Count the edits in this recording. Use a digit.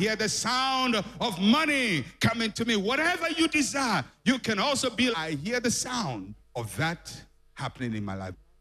2